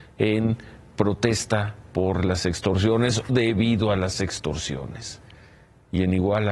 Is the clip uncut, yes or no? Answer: no